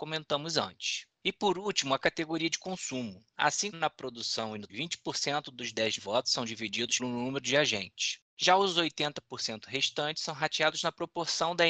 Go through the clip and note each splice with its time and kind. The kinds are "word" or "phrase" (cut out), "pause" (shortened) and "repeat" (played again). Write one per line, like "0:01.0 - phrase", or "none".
0:03.7 - word
0:04.7 - word
0:06.0 - word
0:07.0 - word